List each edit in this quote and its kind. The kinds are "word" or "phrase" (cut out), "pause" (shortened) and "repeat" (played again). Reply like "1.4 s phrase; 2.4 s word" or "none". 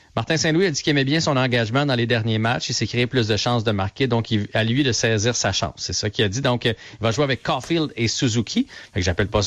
none